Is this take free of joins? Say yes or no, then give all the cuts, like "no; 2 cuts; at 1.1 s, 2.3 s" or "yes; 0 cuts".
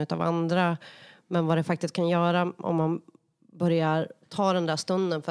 yes; 0 cuts